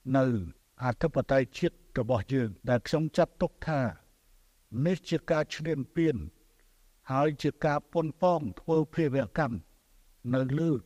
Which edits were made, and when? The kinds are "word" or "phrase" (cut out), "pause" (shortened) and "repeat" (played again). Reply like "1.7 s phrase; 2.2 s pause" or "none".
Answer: 2.6 s pause

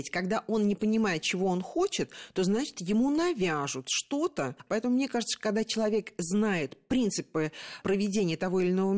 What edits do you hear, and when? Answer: none

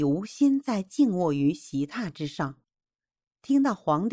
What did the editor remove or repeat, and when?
none

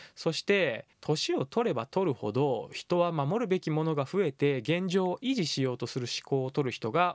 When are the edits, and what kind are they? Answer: 0.9 s pause

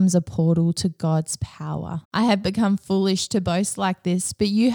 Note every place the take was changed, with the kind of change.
2.0 s pause

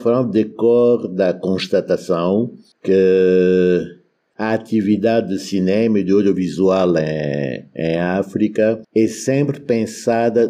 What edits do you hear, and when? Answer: none

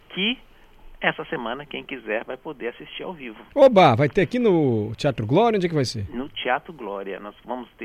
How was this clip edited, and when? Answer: 3.5 s pause

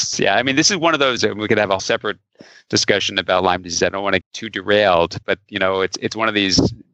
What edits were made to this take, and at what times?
1.2 s word; 1.8 s word; 4.2 s word; 5.2 s word

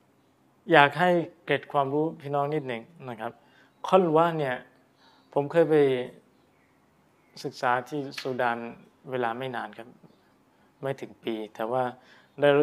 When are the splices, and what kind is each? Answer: none

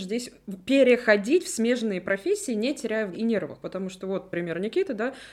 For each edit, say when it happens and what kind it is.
3.1 s word

